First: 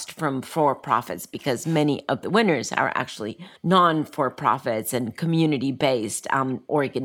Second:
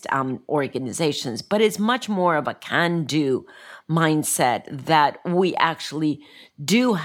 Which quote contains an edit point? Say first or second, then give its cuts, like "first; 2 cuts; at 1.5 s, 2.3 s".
first; 1 cut; at 3.6 s